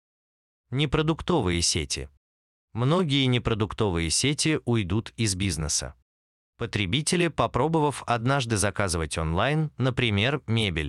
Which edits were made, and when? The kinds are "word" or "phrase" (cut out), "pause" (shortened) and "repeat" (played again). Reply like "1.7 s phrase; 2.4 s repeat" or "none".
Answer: none